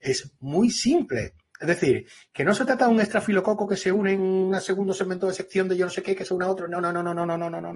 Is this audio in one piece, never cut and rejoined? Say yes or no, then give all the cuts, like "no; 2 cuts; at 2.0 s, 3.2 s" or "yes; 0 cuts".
yes; 0 cuts